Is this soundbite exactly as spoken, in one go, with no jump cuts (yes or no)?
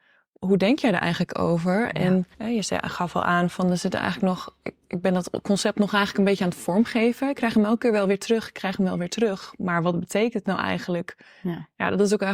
no